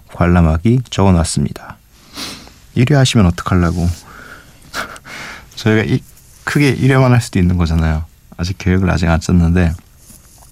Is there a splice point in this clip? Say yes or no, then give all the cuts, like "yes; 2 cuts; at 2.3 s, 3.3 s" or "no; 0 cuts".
no; 0 cuts